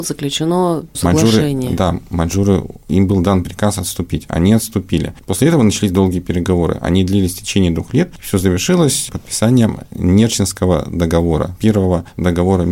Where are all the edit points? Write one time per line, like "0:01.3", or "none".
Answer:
none